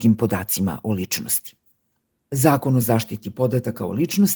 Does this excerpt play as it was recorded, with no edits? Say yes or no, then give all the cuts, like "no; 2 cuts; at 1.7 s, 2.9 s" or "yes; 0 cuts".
yes; 0 cuts